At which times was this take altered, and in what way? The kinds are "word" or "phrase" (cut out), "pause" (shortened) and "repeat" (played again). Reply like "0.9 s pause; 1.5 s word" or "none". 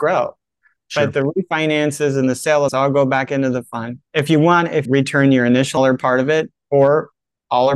2.7 s word; 4.1 s pause; 4.8 s phrase; 5.8 s phrase